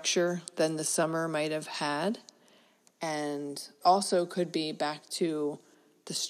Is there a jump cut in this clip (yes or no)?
yes